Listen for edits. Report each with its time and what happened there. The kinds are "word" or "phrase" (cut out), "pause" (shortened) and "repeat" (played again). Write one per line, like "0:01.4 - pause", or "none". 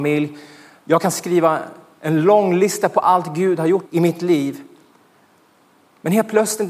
0:03.9 - word